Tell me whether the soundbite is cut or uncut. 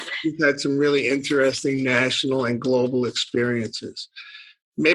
uncut